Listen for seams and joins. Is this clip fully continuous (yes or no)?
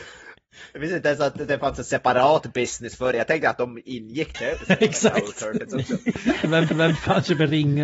no